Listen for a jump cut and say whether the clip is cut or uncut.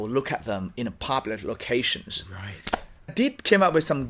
cut